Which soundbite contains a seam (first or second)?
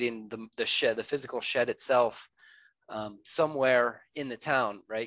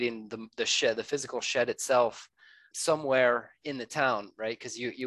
second